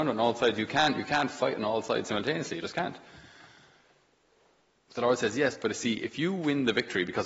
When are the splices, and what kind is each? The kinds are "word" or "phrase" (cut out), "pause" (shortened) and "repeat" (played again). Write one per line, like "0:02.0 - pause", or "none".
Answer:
none